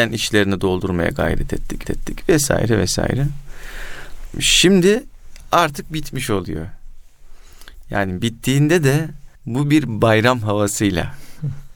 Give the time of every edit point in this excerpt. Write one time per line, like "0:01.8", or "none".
0:01.8
0:09.4